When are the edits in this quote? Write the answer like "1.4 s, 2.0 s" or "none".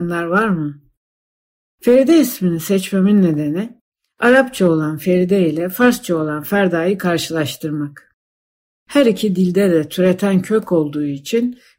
none